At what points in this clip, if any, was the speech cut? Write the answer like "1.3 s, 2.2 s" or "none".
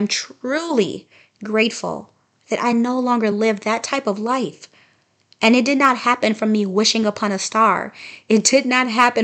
none